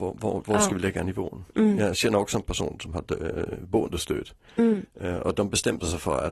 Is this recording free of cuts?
yes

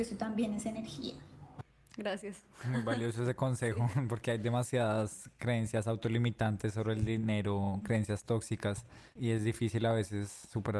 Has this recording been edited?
no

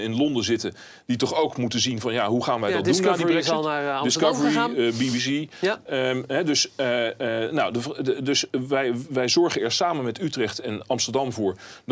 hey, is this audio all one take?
yes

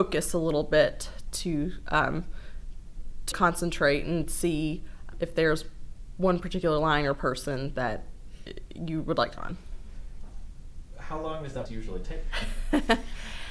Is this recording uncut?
no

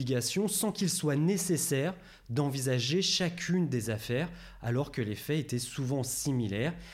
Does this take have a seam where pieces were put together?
no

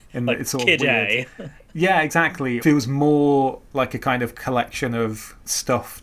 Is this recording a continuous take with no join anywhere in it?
no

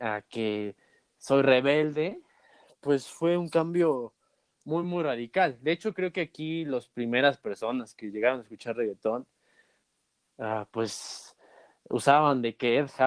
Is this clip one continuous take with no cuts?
yes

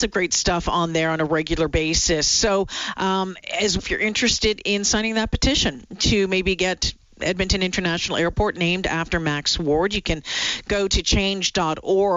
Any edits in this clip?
yes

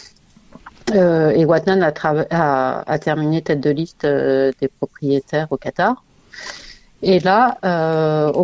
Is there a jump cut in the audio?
no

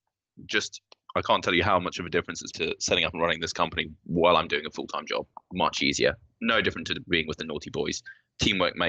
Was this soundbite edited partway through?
yes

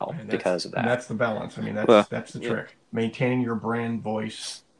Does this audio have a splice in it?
yes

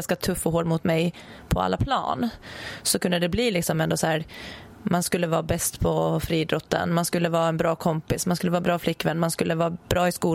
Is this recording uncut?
yes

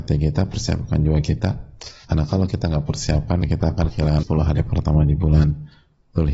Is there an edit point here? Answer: yes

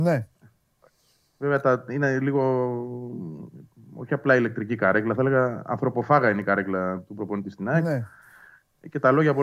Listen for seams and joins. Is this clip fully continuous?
yes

